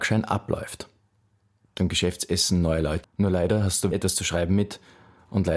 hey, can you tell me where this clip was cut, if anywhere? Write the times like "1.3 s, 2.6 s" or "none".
1.8 s, 3.0 s, 3.9 s